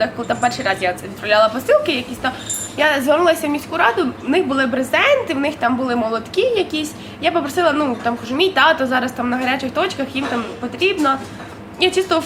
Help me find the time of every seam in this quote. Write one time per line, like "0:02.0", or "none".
none